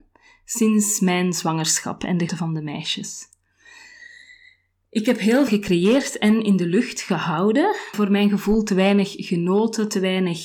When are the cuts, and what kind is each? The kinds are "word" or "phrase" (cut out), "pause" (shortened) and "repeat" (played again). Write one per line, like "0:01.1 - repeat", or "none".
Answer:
0:02.3 - word
0:05.5 - word
0:07.9 - word